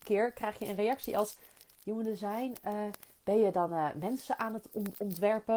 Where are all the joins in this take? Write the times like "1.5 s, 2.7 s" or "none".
none